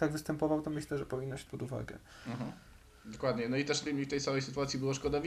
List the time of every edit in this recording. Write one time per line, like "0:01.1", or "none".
0:01.5
0:03.9